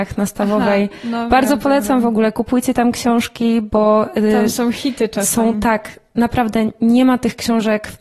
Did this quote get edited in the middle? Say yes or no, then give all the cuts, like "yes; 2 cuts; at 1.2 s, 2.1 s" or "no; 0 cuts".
no; 0 cuts